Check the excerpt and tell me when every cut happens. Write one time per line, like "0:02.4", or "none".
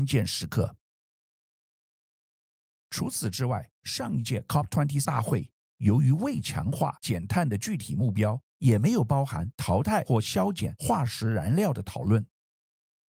0:03.7
0:05.0
0:08.5